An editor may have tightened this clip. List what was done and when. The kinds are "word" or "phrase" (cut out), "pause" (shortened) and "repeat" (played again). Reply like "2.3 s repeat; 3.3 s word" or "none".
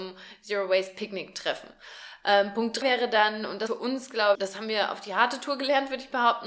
2.8 s word; 3.7 s word; 4.3 s word